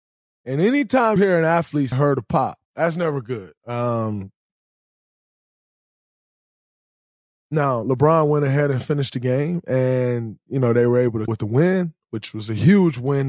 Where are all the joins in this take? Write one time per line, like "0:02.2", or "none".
0:01.2
0:01.9
0:02.6
0:03.6
0:11.3